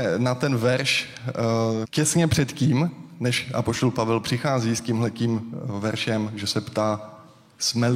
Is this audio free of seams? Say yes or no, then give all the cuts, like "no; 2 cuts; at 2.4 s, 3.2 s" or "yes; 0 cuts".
no; 1 cut; at 1.8 s